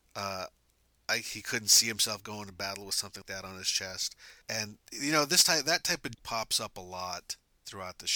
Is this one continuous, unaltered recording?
no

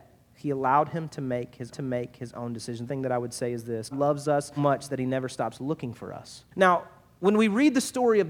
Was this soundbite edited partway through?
yes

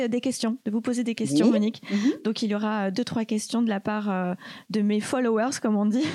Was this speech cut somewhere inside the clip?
no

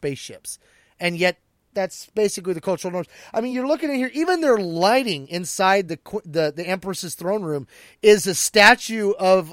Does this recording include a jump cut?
no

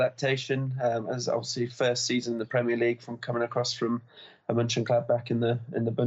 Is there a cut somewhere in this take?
no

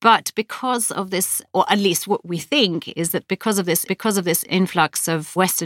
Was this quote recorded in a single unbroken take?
no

